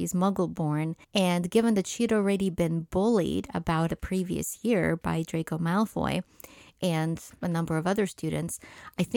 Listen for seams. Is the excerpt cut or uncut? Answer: cut